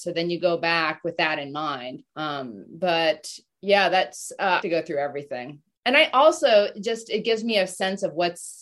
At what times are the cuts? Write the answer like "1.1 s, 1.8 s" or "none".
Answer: 2.1 s, 4.6 s